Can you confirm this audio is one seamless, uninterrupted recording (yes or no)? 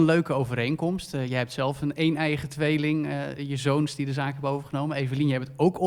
yes